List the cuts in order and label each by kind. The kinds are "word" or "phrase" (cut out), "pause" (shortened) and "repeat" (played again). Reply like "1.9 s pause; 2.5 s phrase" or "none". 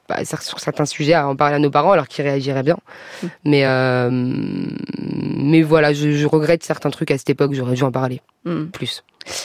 none